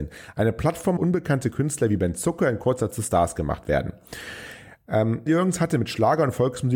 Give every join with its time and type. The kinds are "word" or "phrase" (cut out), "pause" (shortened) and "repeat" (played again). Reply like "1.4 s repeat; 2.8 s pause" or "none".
1.0 s phrase; 2.9 s word; 5.3 s word